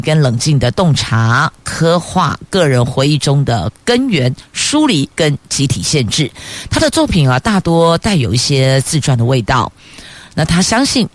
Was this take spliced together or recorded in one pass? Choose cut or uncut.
cut